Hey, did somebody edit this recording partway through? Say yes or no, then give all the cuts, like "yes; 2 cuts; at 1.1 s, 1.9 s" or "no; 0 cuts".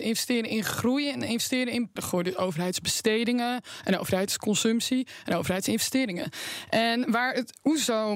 yes; 1 cut; at 2.0 s